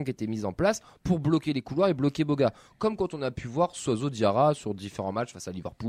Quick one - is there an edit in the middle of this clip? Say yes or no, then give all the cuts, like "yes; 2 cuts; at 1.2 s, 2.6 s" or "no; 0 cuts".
no; 0 cuts